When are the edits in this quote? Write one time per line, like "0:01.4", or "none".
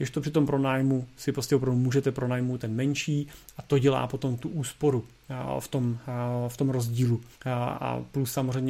0:07.3